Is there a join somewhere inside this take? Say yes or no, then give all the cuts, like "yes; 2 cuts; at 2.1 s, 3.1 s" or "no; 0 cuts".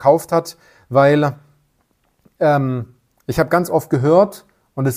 no; 0 cuts